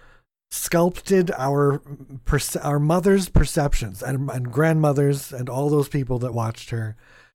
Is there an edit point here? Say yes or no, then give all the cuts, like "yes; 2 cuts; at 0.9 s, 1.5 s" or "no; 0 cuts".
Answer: no; 0 cuts